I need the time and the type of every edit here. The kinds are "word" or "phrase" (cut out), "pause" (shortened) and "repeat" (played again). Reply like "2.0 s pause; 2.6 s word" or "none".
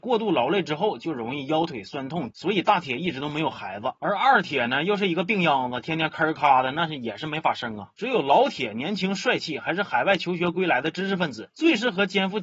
2.3 s phrase